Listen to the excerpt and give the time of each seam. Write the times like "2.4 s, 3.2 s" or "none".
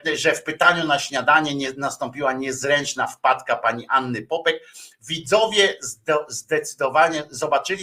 none

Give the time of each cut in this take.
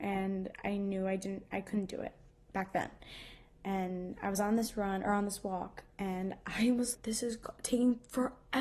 6.9 s

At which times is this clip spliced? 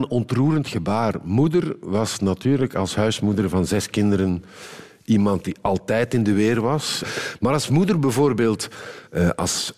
none

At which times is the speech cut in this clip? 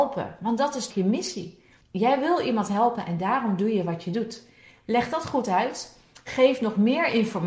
0.9 s, 1.8 s

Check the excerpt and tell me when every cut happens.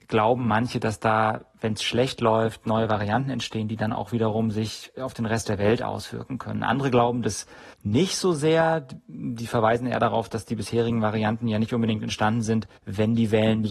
7.7 s, 12.8 s

